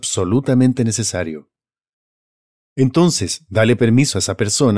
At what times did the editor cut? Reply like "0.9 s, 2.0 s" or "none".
none